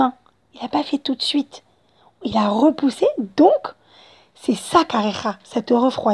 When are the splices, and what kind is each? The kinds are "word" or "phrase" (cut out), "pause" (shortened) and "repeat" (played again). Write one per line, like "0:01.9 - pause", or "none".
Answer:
none